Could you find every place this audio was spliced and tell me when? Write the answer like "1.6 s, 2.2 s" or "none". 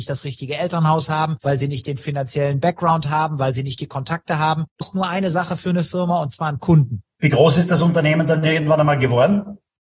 4.8 s